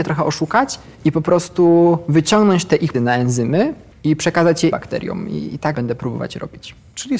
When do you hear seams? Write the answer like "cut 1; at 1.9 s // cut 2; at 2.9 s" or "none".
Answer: cut 1; at 0.9 s // cut 2; at 2.9 s // cut 3; at 3.9 s // cut 4; at 4.7 s // cut 5; at 5.7 s